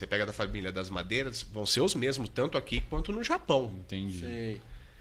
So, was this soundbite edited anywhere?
no; 0 cuts

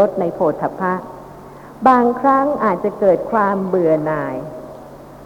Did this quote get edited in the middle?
no; 0 cuts

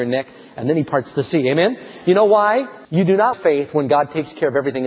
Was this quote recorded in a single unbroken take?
no; 2 cuts; at 2.8 s, 3.3 s

